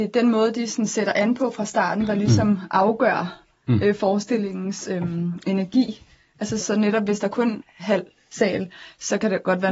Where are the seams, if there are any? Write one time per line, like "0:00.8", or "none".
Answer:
0:06.6
0:07.6